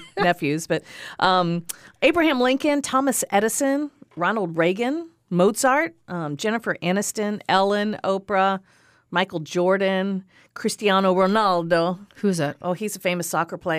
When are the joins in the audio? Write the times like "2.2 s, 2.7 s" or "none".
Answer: none